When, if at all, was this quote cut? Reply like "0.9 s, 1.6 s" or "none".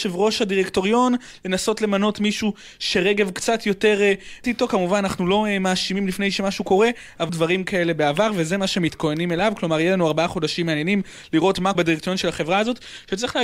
4.4 s, 7.3 s, 11.7 s